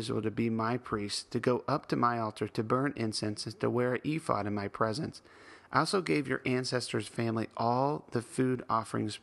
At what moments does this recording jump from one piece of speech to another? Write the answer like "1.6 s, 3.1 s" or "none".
none